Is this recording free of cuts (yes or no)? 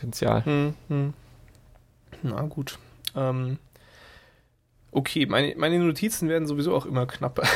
yes